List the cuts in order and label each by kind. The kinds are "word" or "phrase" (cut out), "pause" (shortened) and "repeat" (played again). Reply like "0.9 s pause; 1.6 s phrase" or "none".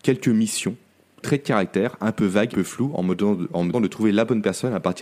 1.2 s word; 2.5 s word; 3.7 s word